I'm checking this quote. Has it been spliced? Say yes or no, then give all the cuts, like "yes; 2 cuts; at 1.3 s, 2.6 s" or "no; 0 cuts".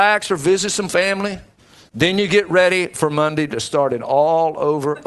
no; 0 cuts